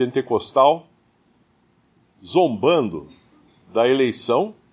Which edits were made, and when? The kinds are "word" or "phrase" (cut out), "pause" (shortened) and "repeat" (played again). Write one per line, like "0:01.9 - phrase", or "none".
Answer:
none